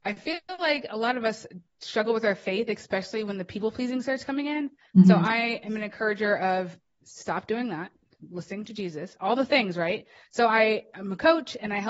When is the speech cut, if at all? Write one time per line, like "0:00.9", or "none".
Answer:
none